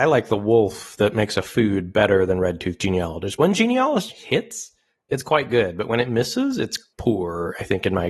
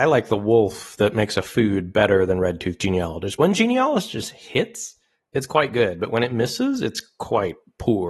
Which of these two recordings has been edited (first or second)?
first